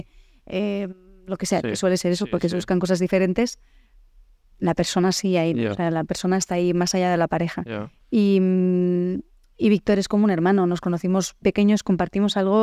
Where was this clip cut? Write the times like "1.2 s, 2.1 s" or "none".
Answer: 11.4 s